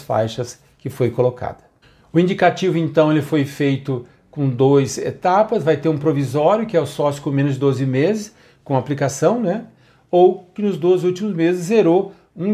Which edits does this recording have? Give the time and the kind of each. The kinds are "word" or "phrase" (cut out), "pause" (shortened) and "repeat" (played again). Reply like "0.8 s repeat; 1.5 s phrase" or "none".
none